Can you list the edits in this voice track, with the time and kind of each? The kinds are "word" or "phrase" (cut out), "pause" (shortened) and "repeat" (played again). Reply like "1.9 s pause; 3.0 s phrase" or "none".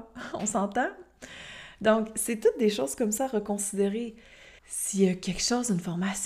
4.6 s pause